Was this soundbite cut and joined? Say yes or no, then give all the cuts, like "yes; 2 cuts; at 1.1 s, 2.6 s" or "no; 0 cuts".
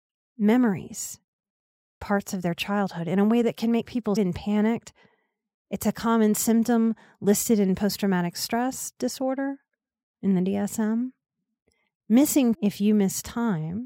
yes; 3 cuts; at 2.0 s, 4.2 s, 12.5 s